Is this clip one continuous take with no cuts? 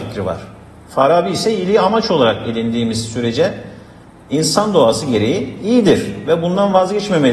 yes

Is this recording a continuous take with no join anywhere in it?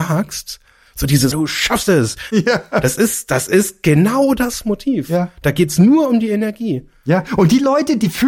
no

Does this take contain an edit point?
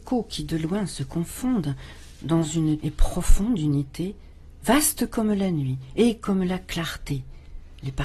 yes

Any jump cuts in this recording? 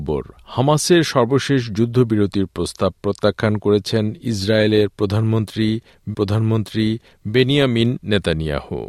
yes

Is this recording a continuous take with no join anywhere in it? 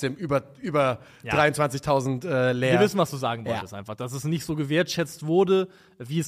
yes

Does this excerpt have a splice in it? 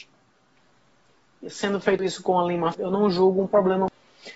yes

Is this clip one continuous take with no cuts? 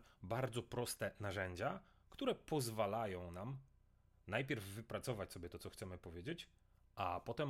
yes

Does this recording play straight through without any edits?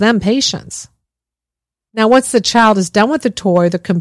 yes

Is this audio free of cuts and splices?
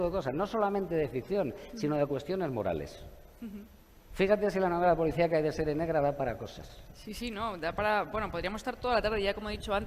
yes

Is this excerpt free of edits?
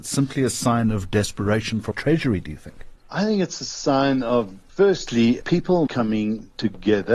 no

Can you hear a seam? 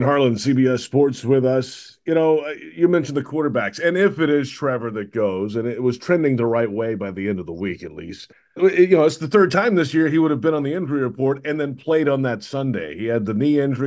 yes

